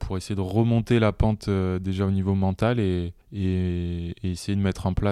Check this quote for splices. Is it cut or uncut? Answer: cut